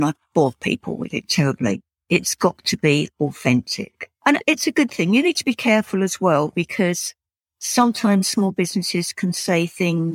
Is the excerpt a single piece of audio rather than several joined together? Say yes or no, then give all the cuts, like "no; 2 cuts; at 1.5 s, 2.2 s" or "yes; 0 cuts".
yes; 0 cuts